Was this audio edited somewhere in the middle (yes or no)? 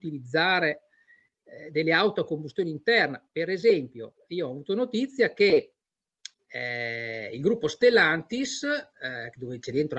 no